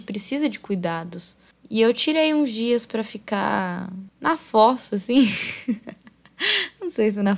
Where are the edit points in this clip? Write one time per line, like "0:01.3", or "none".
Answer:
none

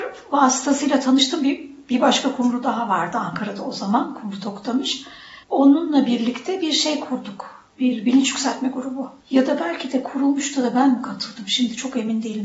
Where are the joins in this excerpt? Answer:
0:05.4
0:09.2

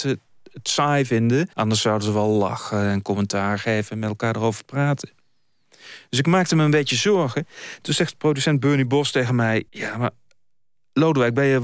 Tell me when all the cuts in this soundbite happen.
0:01.5
0:09.7

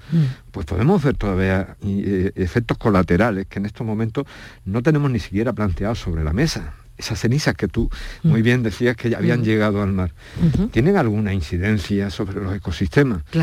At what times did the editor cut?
0:01.8

